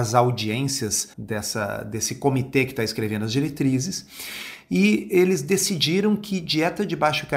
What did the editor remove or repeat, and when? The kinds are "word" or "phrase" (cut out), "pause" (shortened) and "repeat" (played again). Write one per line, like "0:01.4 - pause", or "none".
0:01.1 - pause